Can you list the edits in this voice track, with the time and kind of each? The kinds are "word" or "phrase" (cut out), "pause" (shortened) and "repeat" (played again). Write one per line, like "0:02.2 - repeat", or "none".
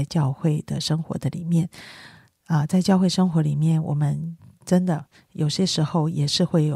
none